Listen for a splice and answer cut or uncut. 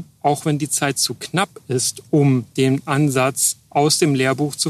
uncut